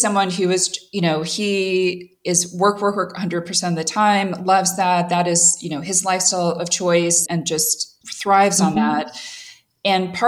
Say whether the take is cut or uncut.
cut